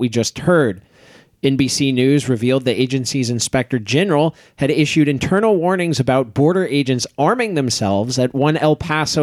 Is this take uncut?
yes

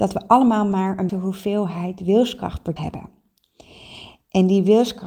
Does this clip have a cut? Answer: yes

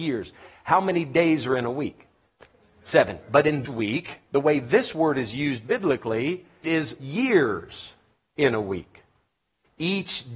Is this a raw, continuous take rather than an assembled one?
no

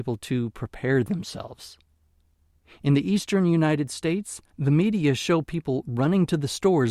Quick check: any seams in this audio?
no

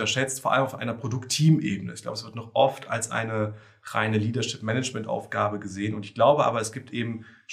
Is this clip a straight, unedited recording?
yes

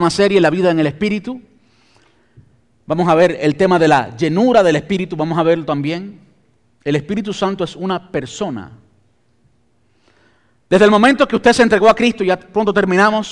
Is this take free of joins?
yes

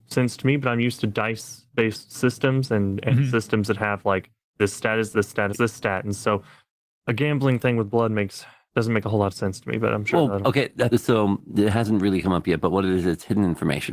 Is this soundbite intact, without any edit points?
no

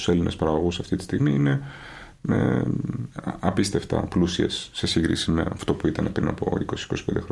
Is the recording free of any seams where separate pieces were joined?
yes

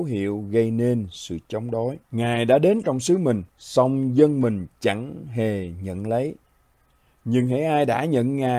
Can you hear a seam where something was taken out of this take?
yes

